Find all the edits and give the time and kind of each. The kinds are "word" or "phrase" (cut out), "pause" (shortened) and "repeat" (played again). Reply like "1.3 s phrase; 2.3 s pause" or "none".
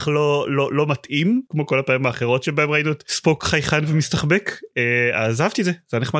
none